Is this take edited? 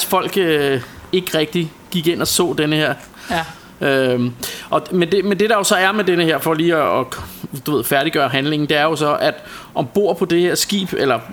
no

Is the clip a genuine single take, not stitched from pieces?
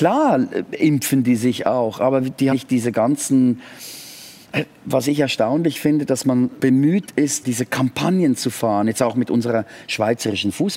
no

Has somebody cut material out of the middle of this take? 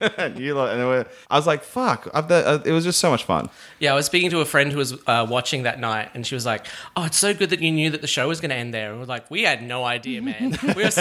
yes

